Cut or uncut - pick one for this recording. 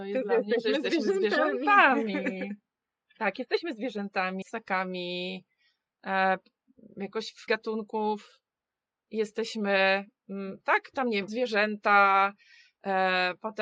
cut